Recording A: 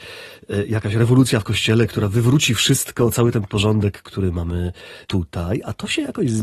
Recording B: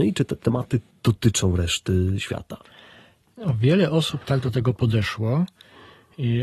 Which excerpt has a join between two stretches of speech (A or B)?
A